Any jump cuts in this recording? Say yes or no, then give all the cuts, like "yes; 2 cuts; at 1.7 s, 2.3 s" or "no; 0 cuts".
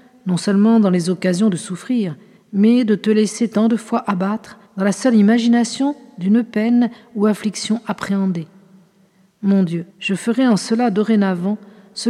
yes; 3 cuts; at 2.4 s, 4.7 s, 9.9 s